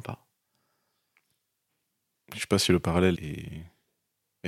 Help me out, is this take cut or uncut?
cut